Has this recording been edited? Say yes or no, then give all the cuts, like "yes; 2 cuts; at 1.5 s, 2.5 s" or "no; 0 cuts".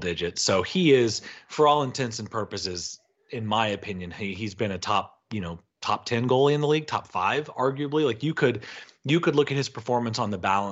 no; 0 cuts